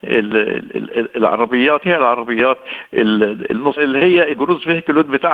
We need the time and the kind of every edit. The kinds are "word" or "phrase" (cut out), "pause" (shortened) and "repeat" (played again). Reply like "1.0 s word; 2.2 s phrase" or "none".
1.8 s phrase; 3.8 s word; 4.3 s word